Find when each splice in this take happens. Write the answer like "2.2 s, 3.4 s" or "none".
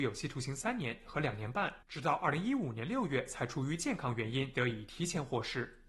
1.8 s